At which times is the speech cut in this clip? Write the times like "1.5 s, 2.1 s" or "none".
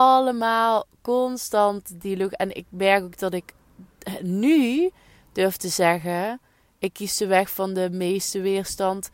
none